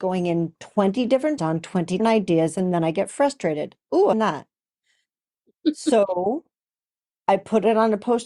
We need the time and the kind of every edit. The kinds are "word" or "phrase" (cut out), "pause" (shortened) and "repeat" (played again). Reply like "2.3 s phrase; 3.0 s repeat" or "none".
1.4 s word; 2.0 s word; 4.1 s word